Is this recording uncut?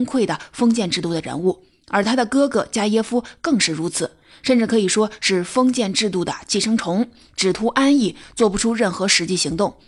yes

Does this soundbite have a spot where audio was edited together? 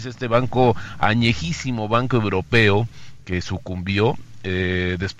no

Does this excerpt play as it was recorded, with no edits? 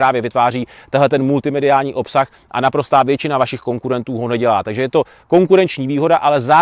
yes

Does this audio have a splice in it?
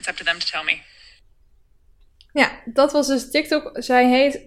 no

